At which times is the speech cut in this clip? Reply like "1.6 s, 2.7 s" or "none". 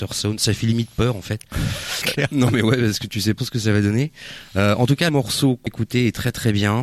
2.0 s, 3.4 s, 5.1 s, 5.7 s

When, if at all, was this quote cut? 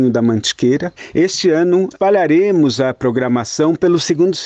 none

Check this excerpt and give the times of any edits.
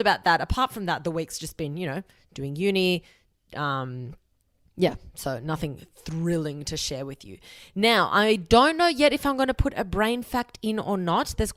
none

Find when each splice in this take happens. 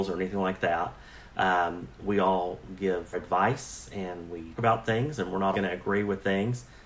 3.1 s, 4.6 s, 5.5 s

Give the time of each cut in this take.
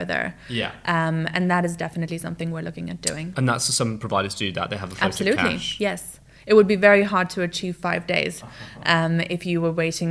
none

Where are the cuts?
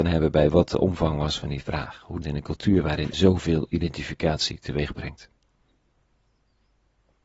2.2 s, 3.1 s

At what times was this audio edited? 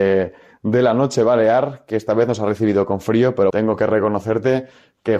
3.5 s

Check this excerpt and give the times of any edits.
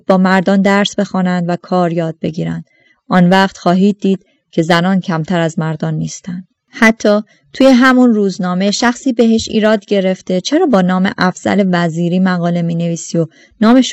none

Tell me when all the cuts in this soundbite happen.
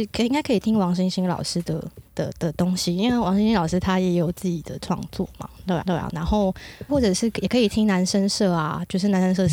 2.1 s, 5.8 s, 6.9 s

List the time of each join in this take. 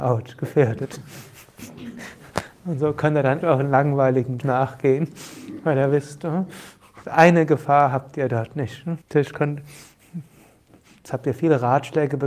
3.4 s, 4.4 s, 7.0 s, 9.0 s

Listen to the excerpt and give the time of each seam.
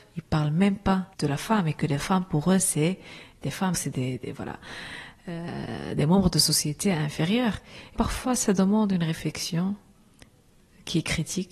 1.1 s, 3.7 s, 8.0 s

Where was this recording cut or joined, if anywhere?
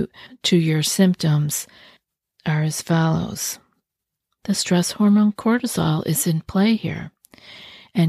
none

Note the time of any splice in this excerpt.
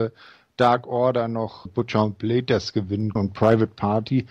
1.7 s, 3.2 s

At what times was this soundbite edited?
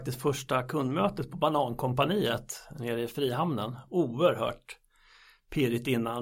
none

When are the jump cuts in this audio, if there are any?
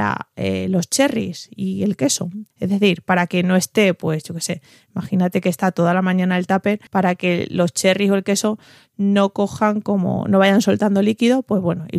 2.5 s, 6.9 s

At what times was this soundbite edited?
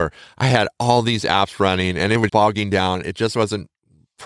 2.3 s

